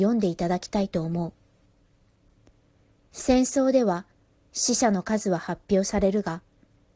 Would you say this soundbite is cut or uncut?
uncut